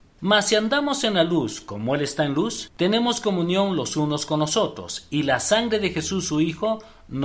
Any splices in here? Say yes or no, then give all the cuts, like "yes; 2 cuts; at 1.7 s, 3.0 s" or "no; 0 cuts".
yes; 1 cut; at 2.7 s